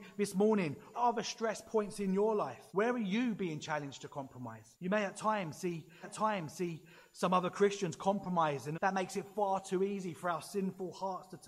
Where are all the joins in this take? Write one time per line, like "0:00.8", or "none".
0:00.9
0:02.7
0:04.7
0:06.0
0:08.7